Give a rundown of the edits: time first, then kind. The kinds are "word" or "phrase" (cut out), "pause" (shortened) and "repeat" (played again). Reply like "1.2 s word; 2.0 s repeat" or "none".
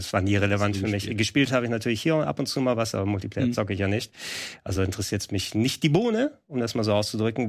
none